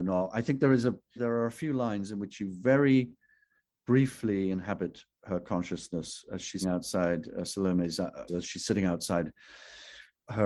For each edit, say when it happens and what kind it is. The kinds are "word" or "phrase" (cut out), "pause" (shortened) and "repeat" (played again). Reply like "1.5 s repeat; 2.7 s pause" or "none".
1.2 s word; 6.6 s word; 8.3 s word

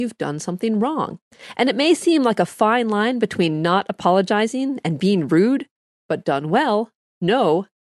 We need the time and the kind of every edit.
none

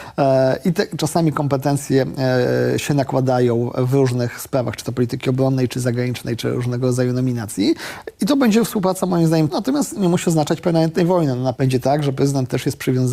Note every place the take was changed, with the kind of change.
9.5 s word; 10.0 s word; 11.5 s word

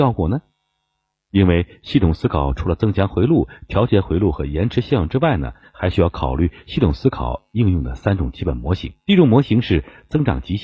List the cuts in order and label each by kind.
9.0 s pause

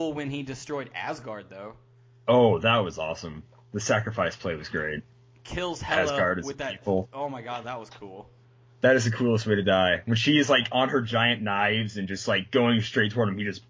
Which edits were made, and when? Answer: none

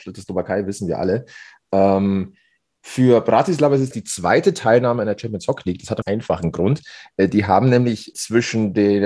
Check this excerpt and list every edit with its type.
3.9 s word; 6.0 s phrase; 8.1 s word

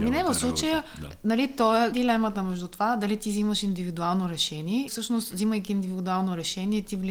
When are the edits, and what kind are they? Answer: 1.9 s word; 4.9 s word

